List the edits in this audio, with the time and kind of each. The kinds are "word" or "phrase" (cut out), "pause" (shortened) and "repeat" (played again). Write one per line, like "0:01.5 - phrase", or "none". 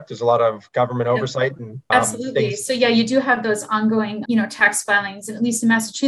0:01.9 - word
0:04.2 - word